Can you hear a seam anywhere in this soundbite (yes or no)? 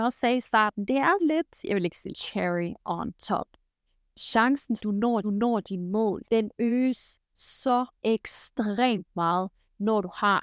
yes